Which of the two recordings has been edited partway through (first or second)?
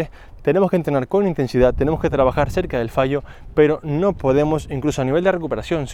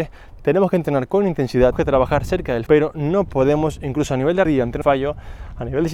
second